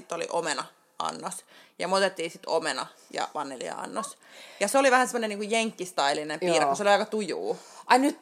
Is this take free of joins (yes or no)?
yes